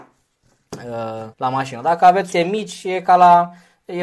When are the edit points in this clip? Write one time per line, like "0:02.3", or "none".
0:01.3
0:02.3

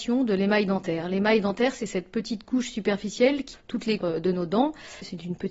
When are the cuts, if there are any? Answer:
0:03.5
0:04.0

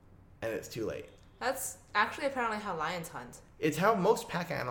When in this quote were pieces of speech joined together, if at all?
none

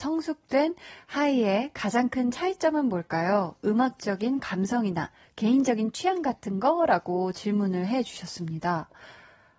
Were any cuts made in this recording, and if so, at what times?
none

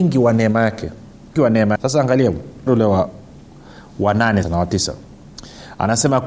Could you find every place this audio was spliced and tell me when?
0:01.4
0:01.8
0:02.7
0:04.4

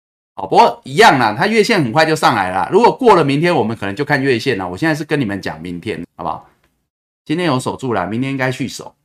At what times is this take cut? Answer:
0:06.0

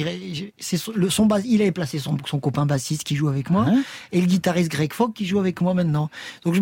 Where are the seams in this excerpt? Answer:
none

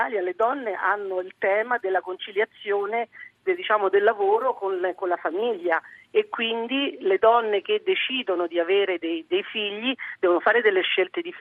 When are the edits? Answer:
none

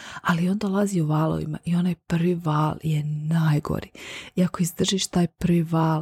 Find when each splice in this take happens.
none

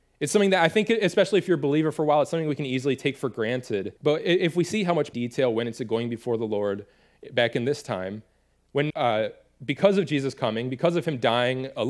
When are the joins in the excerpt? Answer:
0:04.0
0:05.1
0:08.9

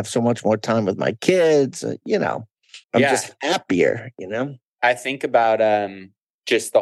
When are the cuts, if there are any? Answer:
0:02.8

